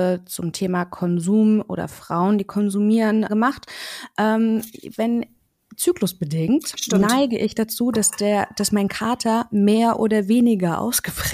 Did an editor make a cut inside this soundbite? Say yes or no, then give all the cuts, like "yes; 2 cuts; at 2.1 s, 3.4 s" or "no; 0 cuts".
yes; 1 cut; at 3.3 s